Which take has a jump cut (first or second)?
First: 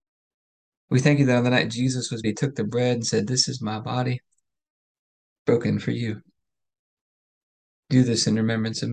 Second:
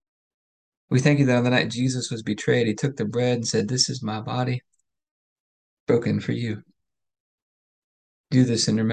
first